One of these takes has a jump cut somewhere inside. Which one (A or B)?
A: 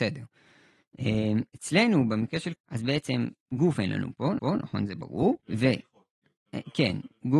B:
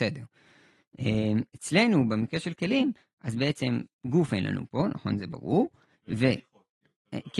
A